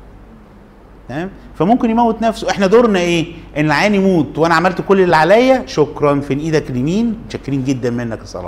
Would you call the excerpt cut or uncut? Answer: uncut